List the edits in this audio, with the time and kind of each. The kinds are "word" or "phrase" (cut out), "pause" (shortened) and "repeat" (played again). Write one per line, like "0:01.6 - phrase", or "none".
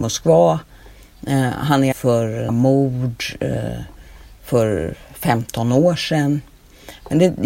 0:01.9 - word
0:02.5 - word